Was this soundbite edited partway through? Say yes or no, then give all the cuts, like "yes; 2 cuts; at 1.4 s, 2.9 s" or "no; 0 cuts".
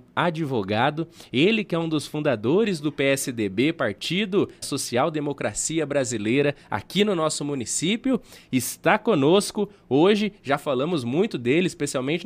yes; 1 cut; at 4.6 s